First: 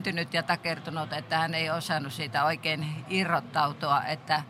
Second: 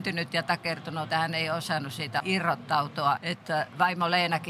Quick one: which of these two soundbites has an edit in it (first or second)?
second